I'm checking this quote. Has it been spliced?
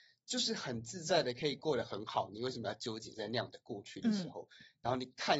no; 0 cuts

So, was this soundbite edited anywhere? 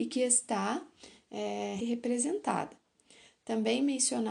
yes; 1 cut; at 1.8 s

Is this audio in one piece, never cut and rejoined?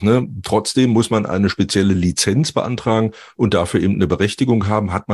yes; 0 cuts

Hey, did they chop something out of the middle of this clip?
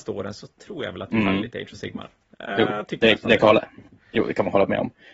no; 0 cuts

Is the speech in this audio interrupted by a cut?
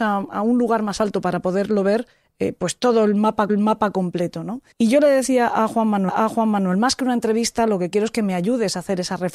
yes; 4 cuts; at 2.1 s, 3.5 s, 4.7 s, 6.1 s

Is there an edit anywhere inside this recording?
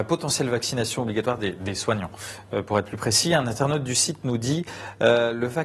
no; 0 cuts

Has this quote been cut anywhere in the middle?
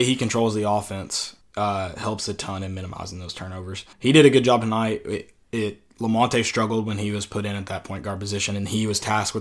yes; 2 cuts; at 1.4 s, 3.9 s

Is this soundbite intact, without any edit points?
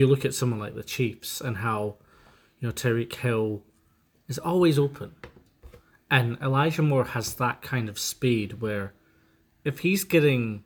yes; 0 cuts

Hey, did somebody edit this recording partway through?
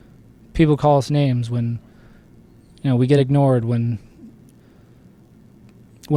no; 0 cuts

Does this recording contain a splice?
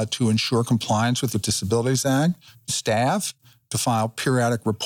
yes; 2 cuts; at 1.3 s, 2.7 s

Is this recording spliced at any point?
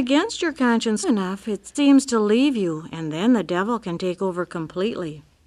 yes; 2 cuts; at 1.0 s, 1.7 s

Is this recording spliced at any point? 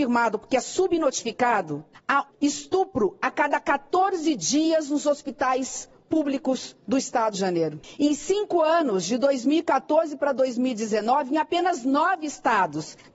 yes; 2 cuts; at 2.3 s, 7.3 s

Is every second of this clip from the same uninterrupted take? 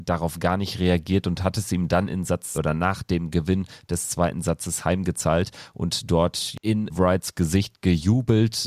no; 2 cuts; at 2.5 s, 6.9 s

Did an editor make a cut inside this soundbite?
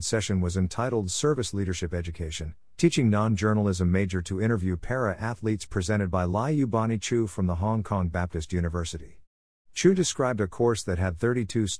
no; 0 cuts

